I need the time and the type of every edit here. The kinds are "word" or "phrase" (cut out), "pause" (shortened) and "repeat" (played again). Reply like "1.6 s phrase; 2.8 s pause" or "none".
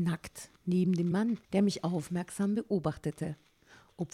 1.1 s word; 1.4 s pause